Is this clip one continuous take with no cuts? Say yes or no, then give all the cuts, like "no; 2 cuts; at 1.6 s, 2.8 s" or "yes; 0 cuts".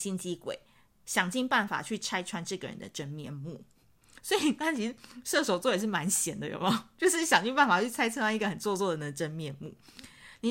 yes; 0 cuts